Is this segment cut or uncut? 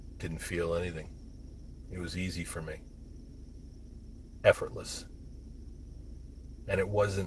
uncut